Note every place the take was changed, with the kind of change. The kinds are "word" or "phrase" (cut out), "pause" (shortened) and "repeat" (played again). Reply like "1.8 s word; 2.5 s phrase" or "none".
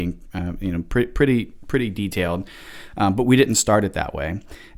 none